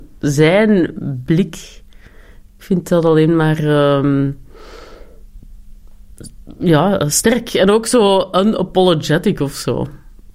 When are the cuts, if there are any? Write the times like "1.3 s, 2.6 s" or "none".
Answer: none